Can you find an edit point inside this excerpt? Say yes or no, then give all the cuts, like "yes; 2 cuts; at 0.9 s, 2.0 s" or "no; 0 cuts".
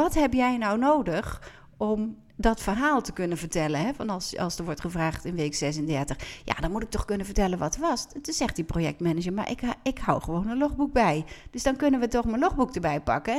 no; 0 cuts